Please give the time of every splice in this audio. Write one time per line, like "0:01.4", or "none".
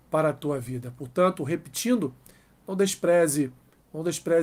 none